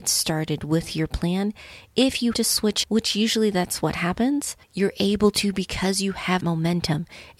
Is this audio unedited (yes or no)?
no